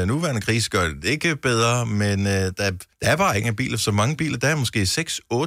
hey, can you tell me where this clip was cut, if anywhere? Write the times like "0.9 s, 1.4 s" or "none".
2.9 s, 3.4 s